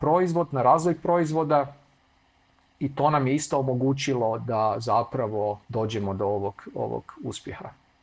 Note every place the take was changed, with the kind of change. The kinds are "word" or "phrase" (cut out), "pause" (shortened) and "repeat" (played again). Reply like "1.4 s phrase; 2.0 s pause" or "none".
5.6 s pause